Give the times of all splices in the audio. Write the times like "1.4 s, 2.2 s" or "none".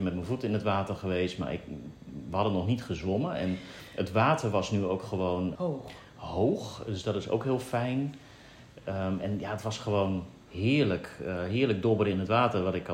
5.5 s, 10.4 s